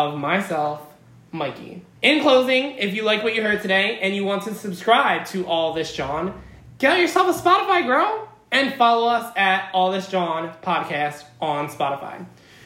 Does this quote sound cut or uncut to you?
cut